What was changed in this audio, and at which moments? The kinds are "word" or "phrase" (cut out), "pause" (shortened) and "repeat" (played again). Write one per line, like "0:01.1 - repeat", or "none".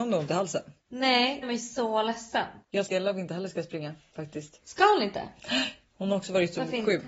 0:01.4 - phrase
0:02.9 - phrase